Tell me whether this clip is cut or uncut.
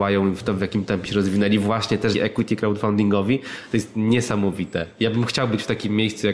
cut